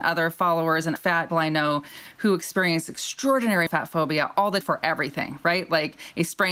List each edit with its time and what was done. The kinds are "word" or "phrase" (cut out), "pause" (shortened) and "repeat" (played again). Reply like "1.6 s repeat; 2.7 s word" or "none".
1.0 s word; 1.3 s word; 3.7 s word; 4.6 s word